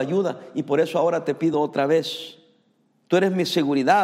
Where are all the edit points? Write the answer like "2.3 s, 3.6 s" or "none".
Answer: none